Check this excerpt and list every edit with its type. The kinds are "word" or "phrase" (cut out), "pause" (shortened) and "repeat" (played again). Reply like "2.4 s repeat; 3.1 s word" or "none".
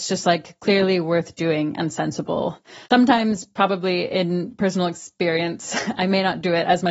2.8 s pause